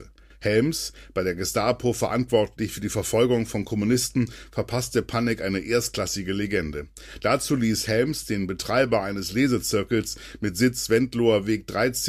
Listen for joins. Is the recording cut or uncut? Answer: uncut